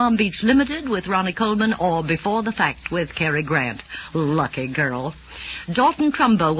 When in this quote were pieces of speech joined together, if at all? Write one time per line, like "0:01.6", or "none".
none